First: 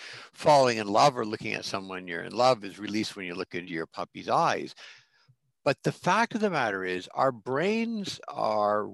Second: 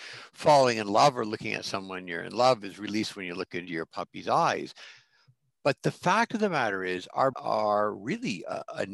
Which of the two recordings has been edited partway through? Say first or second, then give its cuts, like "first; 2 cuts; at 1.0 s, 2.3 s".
second; 1 cut; at 7.3 s